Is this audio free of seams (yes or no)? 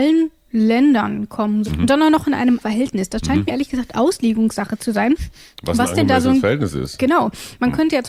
no